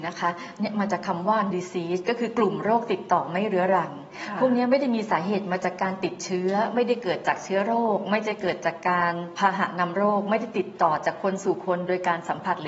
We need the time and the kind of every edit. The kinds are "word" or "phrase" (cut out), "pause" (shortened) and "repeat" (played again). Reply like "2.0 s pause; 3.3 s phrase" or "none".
1.5 s phrase